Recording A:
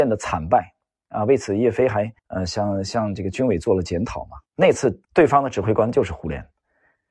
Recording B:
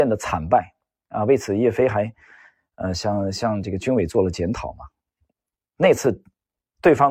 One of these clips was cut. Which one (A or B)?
A